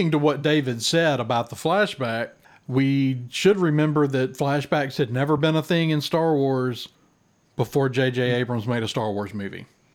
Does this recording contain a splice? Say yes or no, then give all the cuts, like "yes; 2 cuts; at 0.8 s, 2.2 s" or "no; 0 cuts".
no; 0 cuts